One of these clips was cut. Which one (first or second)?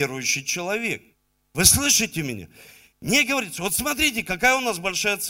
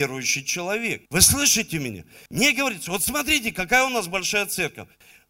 second